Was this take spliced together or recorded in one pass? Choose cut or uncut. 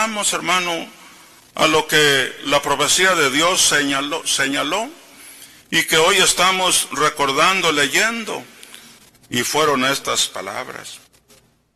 uncut